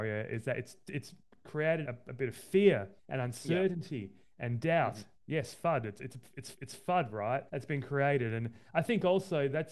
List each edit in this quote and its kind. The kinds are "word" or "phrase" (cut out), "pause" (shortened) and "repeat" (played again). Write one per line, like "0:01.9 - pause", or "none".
0:01.8 - word
0:03.0 - pause
0:06.5 - repeat
0:07.5 - pause